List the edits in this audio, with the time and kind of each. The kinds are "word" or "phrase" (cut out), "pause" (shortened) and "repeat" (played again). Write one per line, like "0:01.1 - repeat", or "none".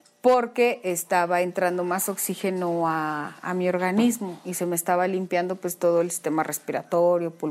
none